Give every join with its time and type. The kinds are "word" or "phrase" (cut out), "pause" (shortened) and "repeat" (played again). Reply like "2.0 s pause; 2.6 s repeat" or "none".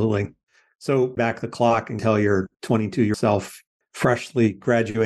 1.2 s phrase; 2.0 s phrase; 2.5 s pause; 3.1 s word; 3.8 s pause